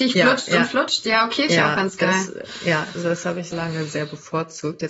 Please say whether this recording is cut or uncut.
cut